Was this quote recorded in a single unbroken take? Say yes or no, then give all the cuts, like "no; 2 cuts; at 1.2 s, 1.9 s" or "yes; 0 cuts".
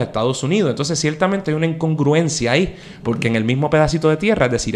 yes; 0 cuts